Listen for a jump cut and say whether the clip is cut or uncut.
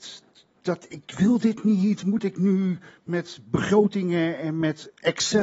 uncut